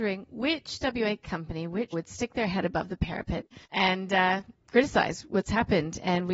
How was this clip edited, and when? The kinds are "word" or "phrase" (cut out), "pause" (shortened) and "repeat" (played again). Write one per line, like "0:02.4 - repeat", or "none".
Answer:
0:01.9 - word
0:03.6 - pause